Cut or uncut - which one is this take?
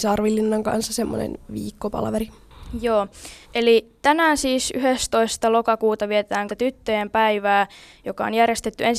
cut